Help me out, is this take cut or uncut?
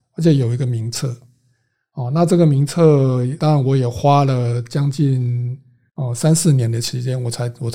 cut